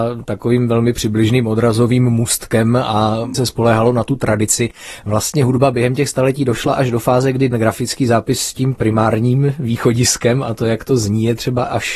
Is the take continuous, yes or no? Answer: no